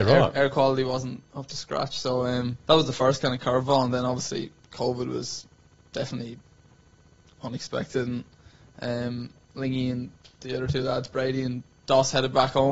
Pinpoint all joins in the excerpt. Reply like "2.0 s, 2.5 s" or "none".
2.6 s